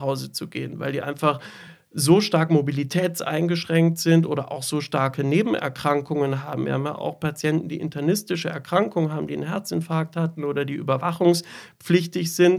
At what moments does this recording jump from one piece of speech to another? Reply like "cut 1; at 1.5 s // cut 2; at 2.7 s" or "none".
none